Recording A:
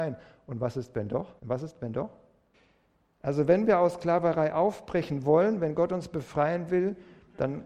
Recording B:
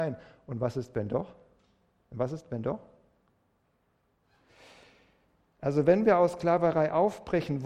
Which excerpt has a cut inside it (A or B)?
A